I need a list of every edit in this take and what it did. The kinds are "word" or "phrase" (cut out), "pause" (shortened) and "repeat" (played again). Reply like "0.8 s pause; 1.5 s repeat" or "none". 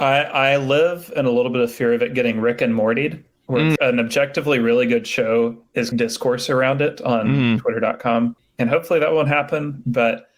3.8 s word; 5.9 s phrase; 8.4 s pause